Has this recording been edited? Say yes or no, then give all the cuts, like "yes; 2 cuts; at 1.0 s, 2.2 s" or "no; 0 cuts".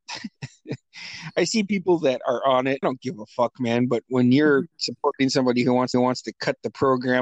yes; 2 cuts; at 2.8 s, 5.9 s